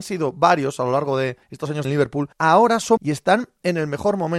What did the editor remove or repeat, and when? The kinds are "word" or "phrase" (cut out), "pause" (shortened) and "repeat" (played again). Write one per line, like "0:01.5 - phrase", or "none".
0:01.4 - pause
0:01.8 - phrase
0:02.3 - pause
0:03.0 - word